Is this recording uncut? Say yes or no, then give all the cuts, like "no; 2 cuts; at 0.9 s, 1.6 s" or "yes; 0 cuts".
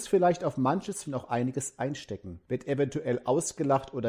no; 2 cuts; at 1.0 s, 2.4 s